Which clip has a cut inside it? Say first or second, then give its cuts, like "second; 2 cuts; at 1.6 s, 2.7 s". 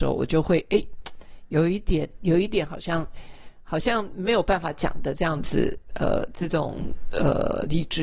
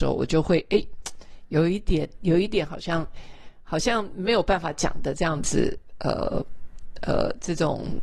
first; 1 cut; at 5.9 s